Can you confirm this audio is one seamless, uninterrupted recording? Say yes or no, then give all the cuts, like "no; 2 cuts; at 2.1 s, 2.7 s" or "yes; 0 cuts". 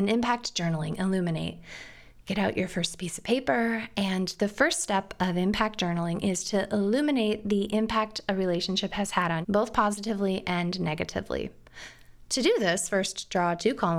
no; 1 cut; at 9.4 s